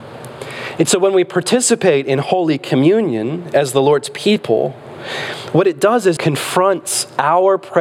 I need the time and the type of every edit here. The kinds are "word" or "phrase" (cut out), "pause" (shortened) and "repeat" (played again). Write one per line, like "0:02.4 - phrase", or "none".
0:06.2 - word